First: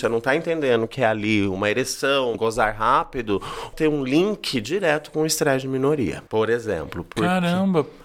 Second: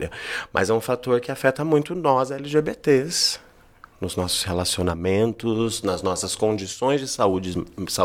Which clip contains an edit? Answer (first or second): first